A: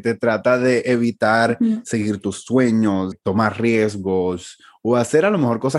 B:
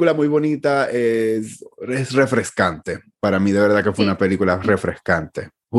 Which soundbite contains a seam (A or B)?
A